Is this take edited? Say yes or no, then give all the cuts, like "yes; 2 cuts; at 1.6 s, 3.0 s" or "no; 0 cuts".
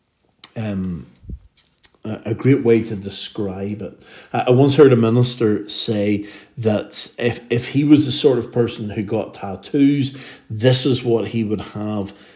no; 0 cuts